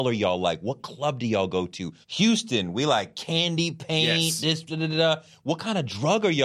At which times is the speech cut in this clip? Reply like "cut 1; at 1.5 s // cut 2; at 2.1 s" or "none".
cut 1; at 2.0 s

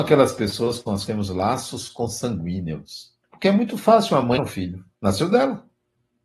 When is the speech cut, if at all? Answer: cut 1; at 1.1 s // cut 2; at 3.2 s // cut 3; at 4.4 s // cut 4; at 4.9 s

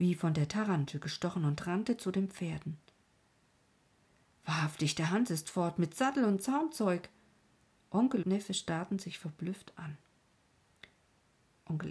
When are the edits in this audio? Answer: cut 1; at 8.2 s

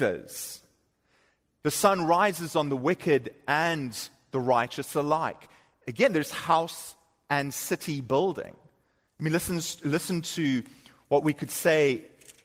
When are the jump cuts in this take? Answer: none

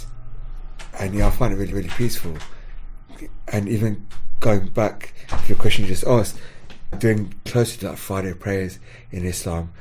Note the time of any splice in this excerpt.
cut 1; at 1.7 s // cut 2; at 6.9 s // cut 3; at 7.5 s // cut 4; at 7.8 s

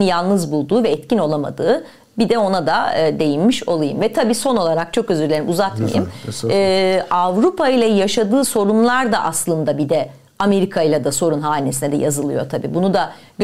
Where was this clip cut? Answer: none

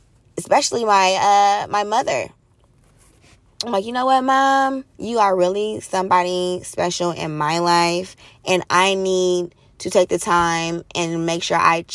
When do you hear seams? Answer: cut 1; at 4.9 s

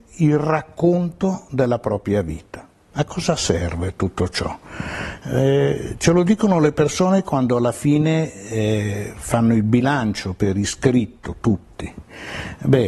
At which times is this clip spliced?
none

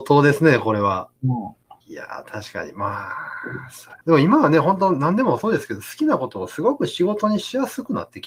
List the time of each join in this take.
cut 1; at 1.2 s // cut 2; at 1.8 s // cut 3; at 4.0 s

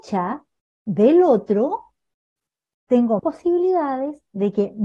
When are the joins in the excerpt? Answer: cut 1; at 3.2 s

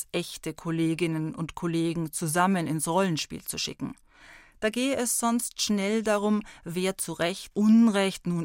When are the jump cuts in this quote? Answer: cut 1; at 7.5 s

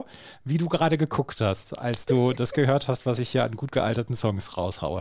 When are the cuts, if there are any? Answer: none

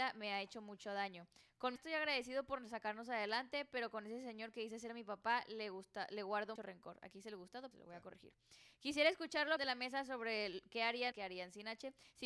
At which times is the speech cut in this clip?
cut 1; at 1.8 s // cut 2; at 6.6 s // cut 3; at 7.7 s // cut 4; at 9.6 s // cut 5; at 11.1 s

